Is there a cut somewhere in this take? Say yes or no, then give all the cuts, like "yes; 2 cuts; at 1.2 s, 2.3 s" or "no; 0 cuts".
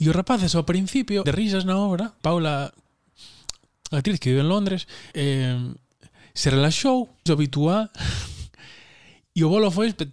yes; 4 cuts; at 1.2 s, 2.2 s, 5.1 s, 7.3 s